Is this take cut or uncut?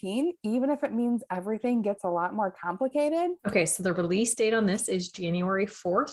cut